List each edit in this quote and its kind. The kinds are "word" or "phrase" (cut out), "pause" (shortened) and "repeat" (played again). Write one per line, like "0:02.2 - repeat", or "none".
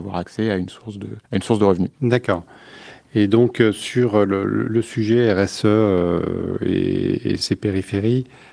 0:01.2 - pause
0:01.9 - pause
0:07.4 - word

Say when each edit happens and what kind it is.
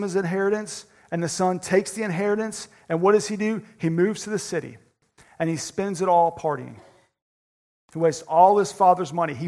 none

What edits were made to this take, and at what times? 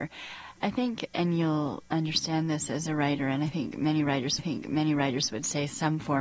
0:01.1 - word
0:04.4 - repeat

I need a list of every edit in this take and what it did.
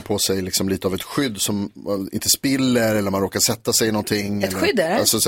none

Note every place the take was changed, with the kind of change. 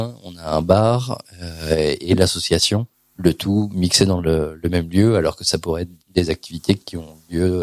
0:02.9 - pause

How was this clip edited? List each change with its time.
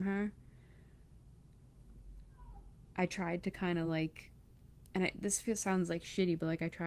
none

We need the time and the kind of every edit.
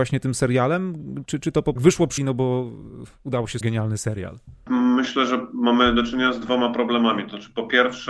0:01.8 - phrase
0:02.2 - word
0:03.6 - word

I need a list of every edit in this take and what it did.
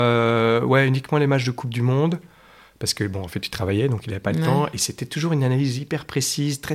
none

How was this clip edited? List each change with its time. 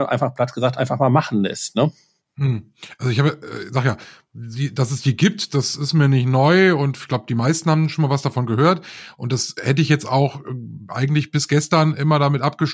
none

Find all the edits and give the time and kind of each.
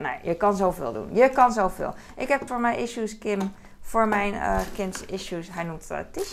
0:02.5 - word

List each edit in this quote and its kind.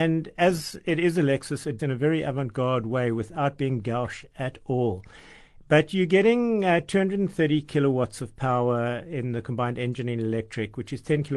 0:01.8 - phrase

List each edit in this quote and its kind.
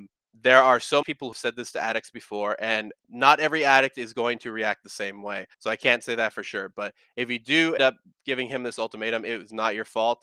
0:01.0 - word
0:01.3 - word
0:03.0 - pause
0:05.5 - pause
0:07.8 - word

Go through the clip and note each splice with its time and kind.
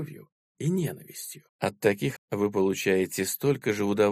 0:01.5 - pause
0:02.2 - word

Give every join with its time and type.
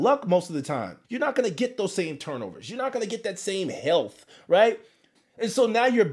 0:01.0 - pause

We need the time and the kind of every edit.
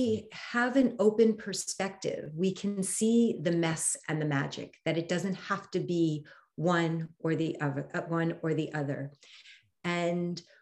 none

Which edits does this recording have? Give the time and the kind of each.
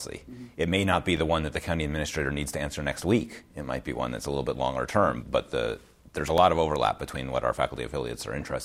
0:05.2 - word

